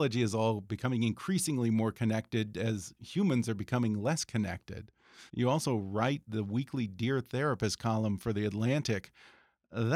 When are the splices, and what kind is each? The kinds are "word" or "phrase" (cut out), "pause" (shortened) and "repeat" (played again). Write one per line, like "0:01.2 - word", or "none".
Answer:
0:05.3 - pause